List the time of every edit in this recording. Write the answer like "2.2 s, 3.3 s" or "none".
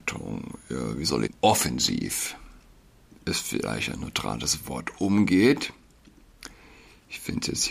1.3 s